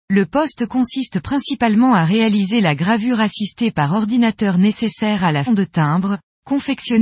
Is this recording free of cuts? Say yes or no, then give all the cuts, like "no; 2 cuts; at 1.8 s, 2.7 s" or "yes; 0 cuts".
no; 1 cut; at 5.5 s